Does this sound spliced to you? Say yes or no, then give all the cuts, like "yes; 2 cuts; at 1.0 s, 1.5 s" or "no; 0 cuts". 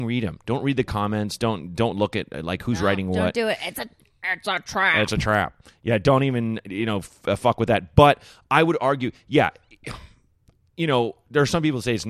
no; 0 cuts